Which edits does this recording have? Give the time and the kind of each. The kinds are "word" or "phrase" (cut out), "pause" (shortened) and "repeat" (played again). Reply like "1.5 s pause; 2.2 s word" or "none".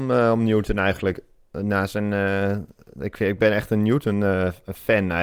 none